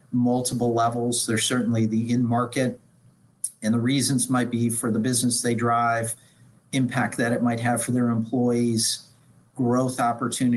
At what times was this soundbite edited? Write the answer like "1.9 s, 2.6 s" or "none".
none